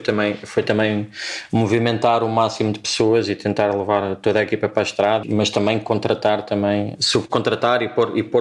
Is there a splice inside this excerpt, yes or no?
yes